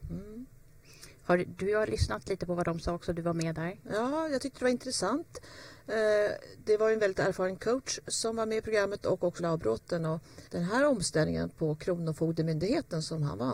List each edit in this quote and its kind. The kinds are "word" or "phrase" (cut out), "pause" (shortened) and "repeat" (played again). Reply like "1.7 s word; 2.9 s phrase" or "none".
9.4 s word; 10.5 s pause